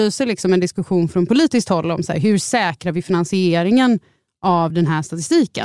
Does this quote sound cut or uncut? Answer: uncut